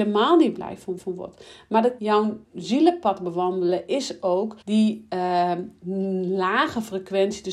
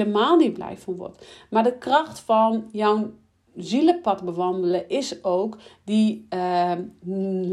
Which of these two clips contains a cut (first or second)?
first